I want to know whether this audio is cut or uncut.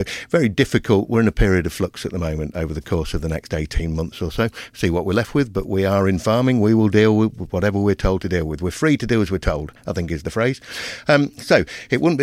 uncut